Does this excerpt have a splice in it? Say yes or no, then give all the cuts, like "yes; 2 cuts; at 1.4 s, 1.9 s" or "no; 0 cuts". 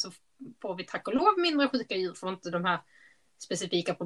yes; 1 cut; at 2.1 s